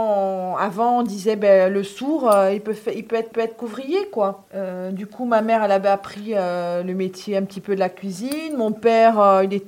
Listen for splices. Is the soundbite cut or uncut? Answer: cut